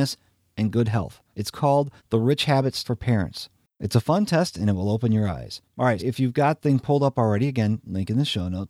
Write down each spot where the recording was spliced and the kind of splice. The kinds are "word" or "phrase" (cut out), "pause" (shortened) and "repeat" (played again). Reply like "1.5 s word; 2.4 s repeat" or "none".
1.3 s pause; 2.0 s pause; 2.8 s word; 5.7 s pause; 6.0 s word; 6.6 s word